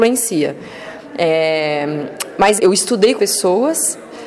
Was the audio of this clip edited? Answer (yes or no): yes